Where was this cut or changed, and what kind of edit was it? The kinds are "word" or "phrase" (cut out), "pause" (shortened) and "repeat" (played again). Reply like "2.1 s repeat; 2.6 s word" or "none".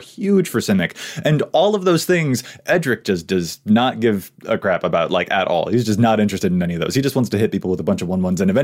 none